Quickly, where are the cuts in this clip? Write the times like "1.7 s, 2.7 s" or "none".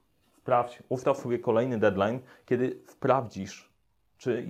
none